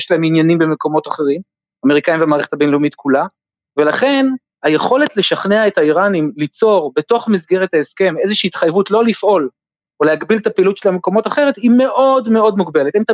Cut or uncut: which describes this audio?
uncut